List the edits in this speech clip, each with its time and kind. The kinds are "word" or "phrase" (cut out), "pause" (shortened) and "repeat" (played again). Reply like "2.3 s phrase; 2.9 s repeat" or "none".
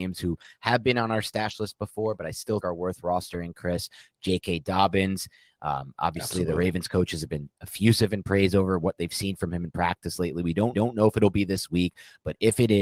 2.6 s word; 10.7 s repeat